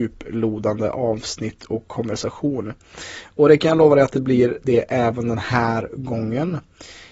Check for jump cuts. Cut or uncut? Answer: uncut